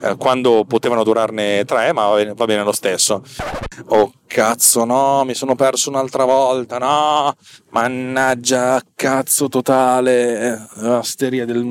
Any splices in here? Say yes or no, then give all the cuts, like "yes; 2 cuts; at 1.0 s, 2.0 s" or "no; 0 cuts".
no; 0 cuts